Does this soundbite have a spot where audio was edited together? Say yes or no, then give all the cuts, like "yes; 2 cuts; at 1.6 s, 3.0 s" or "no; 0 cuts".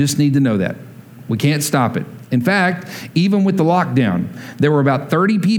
no; 0 cuts